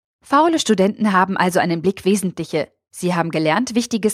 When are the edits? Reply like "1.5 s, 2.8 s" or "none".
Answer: 2.0 s